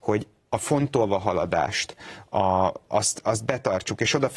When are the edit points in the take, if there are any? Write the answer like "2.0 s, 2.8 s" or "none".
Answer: none